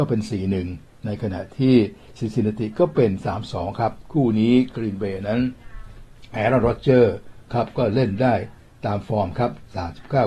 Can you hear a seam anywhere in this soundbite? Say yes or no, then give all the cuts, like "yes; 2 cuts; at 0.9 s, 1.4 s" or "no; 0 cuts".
no; 0 cuts